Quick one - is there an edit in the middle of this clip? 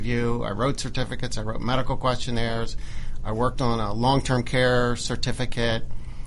no; 0 cuts

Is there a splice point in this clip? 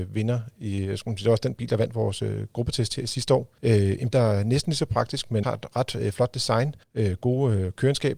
yes; 4 cuts; at 3.6 s, 4.1 s, 5.4 s, 6.8 s

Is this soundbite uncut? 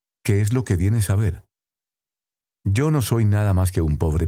yes; 0 cuts

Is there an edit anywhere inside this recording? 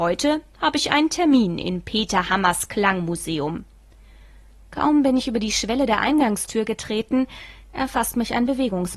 no; 0 cuts

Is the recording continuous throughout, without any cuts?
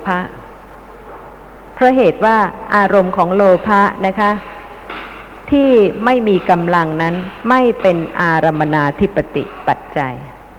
yes; 0 cuts

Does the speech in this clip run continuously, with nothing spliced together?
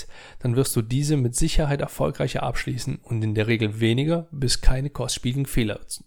yes; 0 cuts

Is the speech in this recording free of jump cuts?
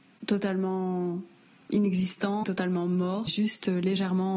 no; 2 cuts; at 2.4 s, 3.3 s

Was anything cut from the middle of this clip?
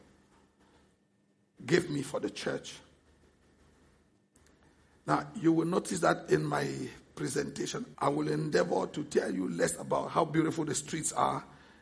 yes; 1 cut; at 7.9 s

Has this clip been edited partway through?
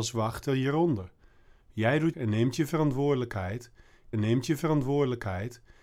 yes; 2 cuts; at 2.1 s, 4.1 s

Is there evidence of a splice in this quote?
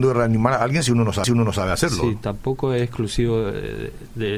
yes; 1 cut; at 1.2 s

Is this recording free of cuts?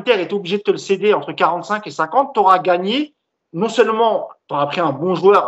yes; 0 cuts

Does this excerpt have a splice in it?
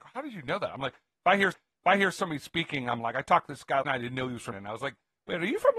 yes; 3 cuts; at 1.5 s, 3.8 s, 4.5 s

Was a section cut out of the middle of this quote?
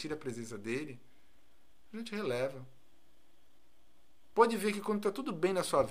no; 0 cuts

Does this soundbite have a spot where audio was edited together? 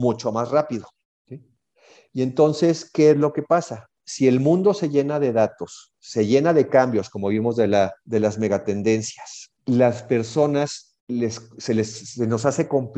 yes; 4 cuts; at 1.0 s, 8.0 s, 9.6 s, 11.0 s

